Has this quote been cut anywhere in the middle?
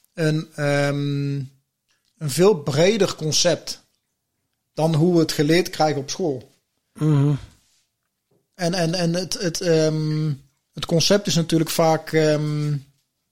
no; 0 cuts

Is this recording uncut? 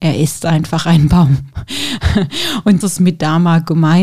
no; 1 cut; at 2.8 s

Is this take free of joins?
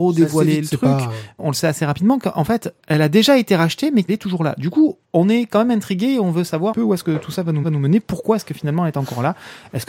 no; 6 cuts; at 1.4 s, 2.8 s, 4.1 s, 5.0 s, 6.7 s, 7.6 s

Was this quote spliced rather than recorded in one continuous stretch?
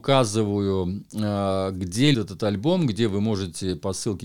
yes; 1 cut; at 2.1 s

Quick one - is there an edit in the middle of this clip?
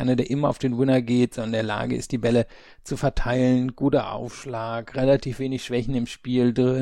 no; 0 cuts

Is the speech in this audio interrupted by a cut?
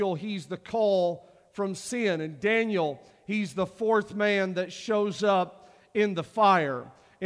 no; 0 cuts

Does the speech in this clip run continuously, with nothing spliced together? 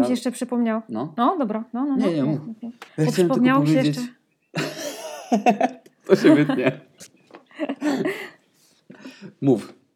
no; 1 cut; at 2.9 s

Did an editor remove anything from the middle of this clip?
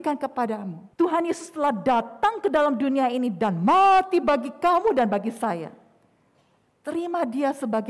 yes; 1 cut; at 0.9 s

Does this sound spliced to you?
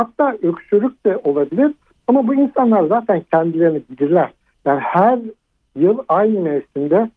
no; 0 cuts

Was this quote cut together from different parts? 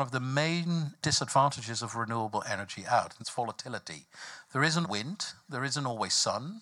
yes; 3 cuts; at 1.0 s, 3.2 s, 4.8 s

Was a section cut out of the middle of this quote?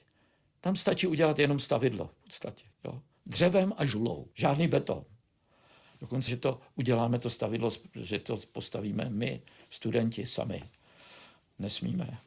yes; 3 cuts; at 2.7 s, 4.3 s, 6.3 s

